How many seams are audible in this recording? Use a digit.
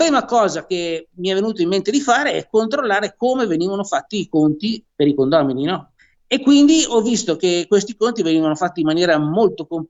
1